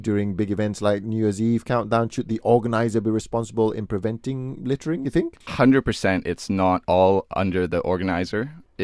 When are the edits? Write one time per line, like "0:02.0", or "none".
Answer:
none